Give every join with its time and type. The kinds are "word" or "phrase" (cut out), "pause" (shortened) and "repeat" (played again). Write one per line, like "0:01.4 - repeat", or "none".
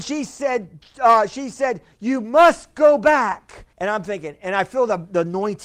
0:03.7 - pause